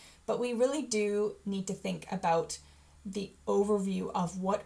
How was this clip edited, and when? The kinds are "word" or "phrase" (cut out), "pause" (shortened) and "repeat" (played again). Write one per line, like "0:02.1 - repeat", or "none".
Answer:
none